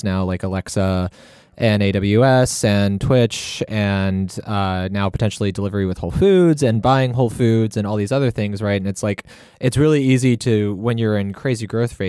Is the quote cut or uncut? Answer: uncut